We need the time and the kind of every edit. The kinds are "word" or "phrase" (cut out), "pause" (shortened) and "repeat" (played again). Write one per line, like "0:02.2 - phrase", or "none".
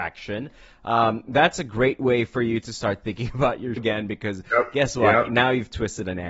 0:03.8 - word